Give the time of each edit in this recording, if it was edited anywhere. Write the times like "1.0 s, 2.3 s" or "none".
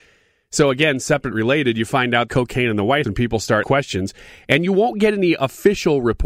1.3 s, 2.3 s, 3.0 s, 3.6 s